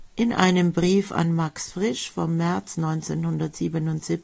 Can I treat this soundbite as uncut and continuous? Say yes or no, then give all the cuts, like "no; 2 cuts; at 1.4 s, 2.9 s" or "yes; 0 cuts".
yes; 0 cuts